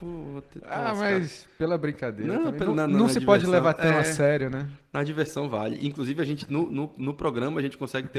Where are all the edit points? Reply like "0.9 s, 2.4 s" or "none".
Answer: none

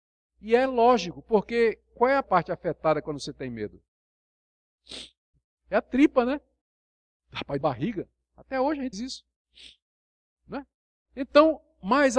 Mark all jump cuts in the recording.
2.2 s, 5.3 s, 7.6 s, 8.9 s

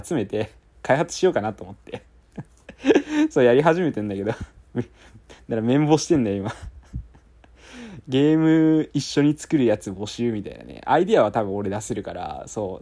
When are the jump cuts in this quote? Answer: 2.5 s

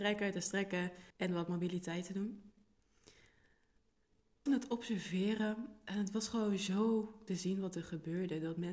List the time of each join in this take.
1.1 s, 4.5 s, 7.3 s

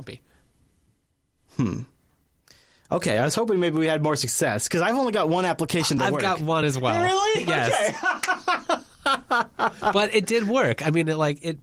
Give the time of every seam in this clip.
none

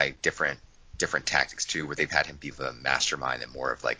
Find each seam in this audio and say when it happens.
2.5 s

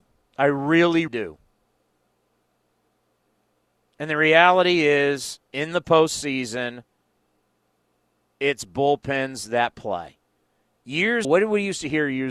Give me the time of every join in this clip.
1.1 s, 11.2 s

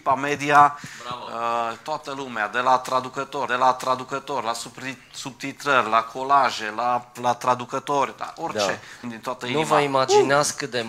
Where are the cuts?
3.5 s, 7.2 s, 9.0 s

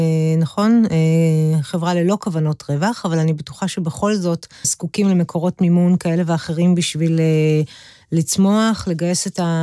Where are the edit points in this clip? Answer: 4.6 s

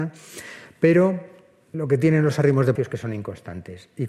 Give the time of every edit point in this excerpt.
1.7 s, 2.7 s

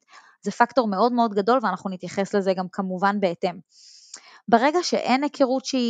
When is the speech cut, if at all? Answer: none

